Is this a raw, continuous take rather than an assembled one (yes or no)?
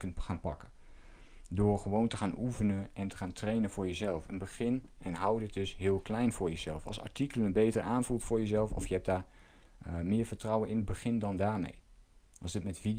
yes